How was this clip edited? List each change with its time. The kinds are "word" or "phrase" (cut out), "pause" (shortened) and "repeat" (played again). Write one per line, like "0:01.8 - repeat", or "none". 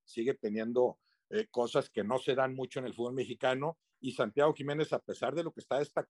none